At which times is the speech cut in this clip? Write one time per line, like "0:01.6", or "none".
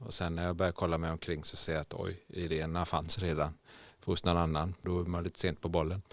0:04.8